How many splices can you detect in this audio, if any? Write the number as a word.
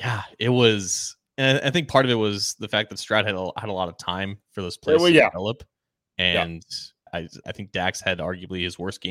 two